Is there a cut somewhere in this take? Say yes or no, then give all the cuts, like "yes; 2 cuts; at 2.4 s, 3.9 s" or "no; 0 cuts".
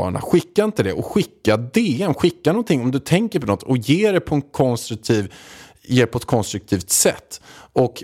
no; 0 cuts